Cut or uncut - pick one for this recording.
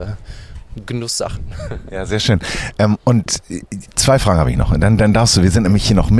cut